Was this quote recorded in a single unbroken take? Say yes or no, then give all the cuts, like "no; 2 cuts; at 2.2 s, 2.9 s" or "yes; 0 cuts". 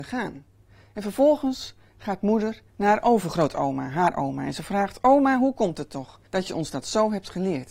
no; 2 cuts; at 2.7 s, 6.3 s